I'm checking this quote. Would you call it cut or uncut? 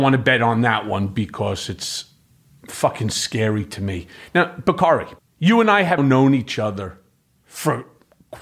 cut